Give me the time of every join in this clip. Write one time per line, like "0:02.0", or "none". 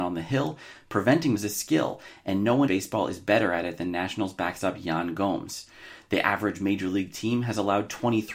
0:01.3
0:02.7